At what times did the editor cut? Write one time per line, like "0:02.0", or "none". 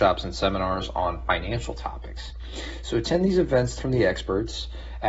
0:03.8